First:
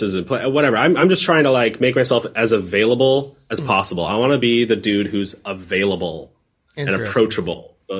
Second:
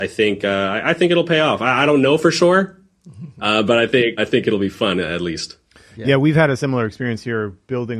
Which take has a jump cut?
second; 1 cut; at 4.2 s

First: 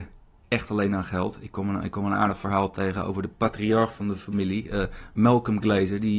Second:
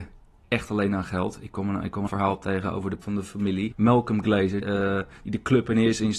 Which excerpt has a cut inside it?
second; 4 cuts; at 2.1 s, 3.0 s, 3.7 s, 4.6 s

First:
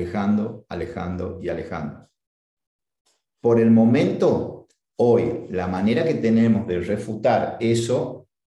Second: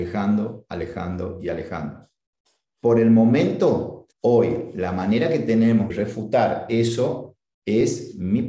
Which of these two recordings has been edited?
second; 3 cuts; at 2.3 s, 4.1 s, 5.9 s

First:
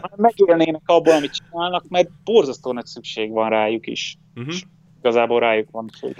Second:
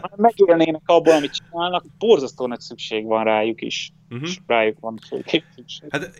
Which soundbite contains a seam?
second; 2 cuts; at 1.9 s, 4.5 s

